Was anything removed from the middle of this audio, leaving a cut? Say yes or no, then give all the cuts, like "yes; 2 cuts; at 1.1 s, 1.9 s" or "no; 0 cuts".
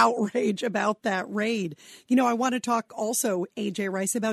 no; 0 cuts